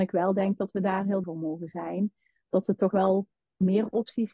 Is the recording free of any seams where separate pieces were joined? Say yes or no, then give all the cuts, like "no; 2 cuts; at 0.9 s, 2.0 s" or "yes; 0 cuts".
no; 2 cuts; at 1.2 s, 2.9 s